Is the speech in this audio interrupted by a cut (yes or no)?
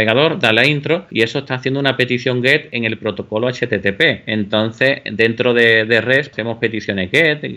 yes